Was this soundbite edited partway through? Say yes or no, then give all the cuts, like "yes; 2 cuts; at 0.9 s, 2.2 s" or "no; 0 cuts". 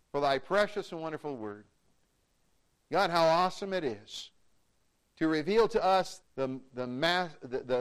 yes; 1 cut; at 6.2 s